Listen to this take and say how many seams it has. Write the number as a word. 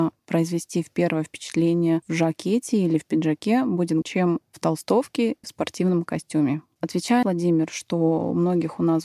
three